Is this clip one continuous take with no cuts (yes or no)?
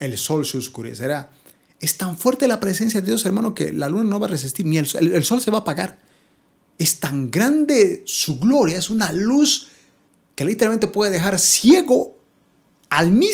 yes